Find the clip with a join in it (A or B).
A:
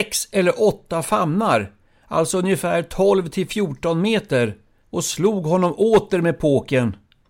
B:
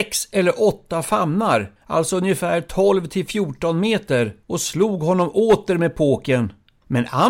B